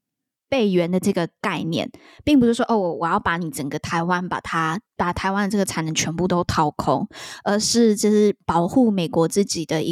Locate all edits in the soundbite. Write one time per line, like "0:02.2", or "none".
0:04.9